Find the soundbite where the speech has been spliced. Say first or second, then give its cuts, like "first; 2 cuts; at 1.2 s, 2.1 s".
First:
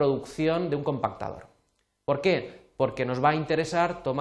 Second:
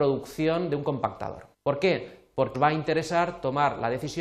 second; 2 cuts; at 1.5 s, 2.5 s